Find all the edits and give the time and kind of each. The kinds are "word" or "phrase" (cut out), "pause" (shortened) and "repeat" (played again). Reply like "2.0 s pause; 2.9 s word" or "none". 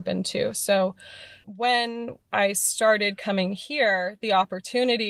1.4 s word; 2.2 s pause